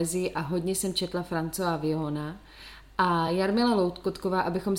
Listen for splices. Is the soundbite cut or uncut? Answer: uncut